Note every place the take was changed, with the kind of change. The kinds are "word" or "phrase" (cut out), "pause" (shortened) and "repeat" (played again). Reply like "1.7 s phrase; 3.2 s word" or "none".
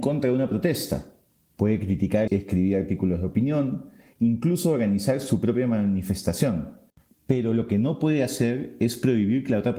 2.3 s phrase